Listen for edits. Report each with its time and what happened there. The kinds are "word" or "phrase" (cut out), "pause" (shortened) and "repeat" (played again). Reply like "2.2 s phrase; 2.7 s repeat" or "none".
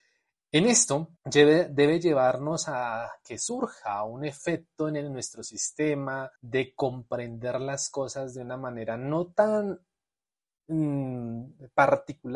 1.2 s pause; 6.4 s pause